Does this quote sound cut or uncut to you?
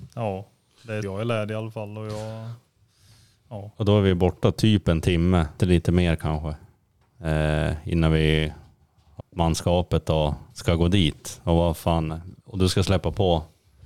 cut